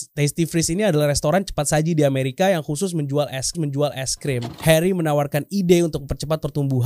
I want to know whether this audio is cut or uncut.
cut